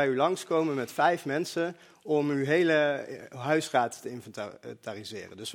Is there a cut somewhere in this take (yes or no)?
no